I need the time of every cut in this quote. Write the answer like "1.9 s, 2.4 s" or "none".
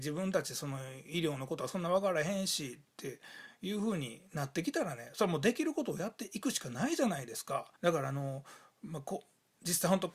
7.8 s

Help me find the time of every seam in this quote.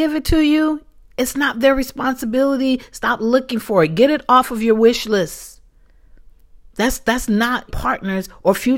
7.7 s

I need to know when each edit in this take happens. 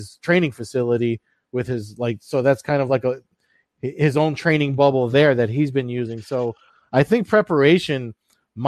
none

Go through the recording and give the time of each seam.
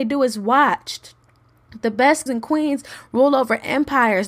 2.3 s

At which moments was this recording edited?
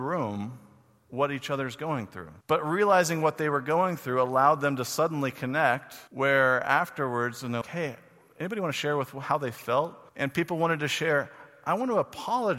2.4 s, 6.1 s, 7.6 s, 10.1 s

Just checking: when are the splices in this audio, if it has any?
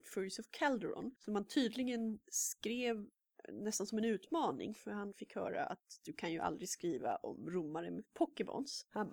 none

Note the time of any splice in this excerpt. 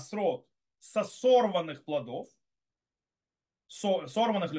none

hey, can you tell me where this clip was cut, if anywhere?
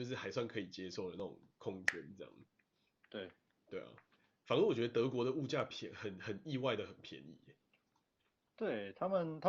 none

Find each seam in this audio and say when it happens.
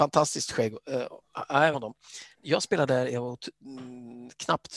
1.7 s

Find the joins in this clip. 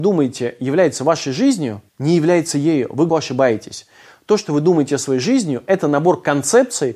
1.9 s, 3.1 s

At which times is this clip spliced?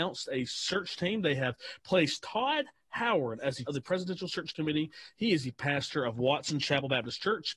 3.7 s

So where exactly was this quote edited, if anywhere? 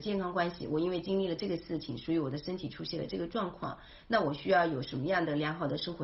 none

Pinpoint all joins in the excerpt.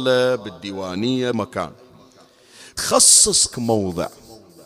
1.3 s, 2.8 s, 3.5 s

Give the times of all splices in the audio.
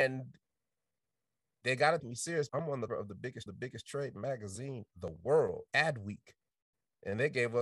2.0 s, 2.5 s, 2.9 s, 3.5 s, 4.9 s, 5.7 s

